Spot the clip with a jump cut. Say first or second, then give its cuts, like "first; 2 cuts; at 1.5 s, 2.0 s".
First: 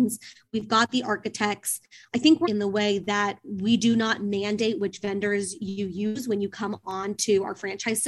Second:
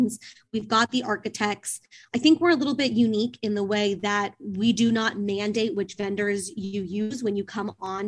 first; 1 cut; at 2.4 s